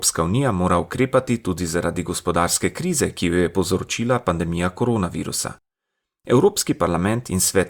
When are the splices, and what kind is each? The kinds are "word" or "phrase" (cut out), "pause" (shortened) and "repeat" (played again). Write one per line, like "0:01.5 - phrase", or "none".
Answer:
none